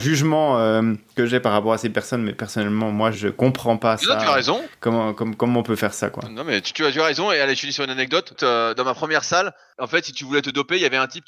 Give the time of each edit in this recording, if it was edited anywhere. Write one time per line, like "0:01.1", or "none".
0:03.1